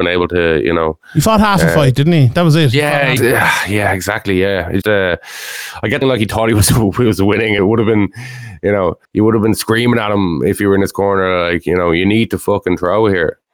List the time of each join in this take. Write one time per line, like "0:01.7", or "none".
0:03.2
0:04.8
0:06.0
0:07.6
0:09.0